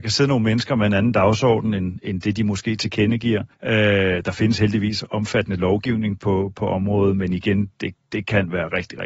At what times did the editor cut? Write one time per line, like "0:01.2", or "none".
0:03.5
0:08.0